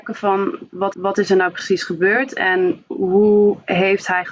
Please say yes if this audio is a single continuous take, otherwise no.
no